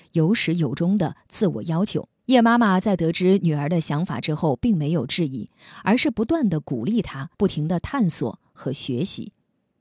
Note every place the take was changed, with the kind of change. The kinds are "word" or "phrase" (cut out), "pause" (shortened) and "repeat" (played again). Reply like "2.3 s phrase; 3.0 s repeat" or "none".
2.2 s pause; 7.3 s pause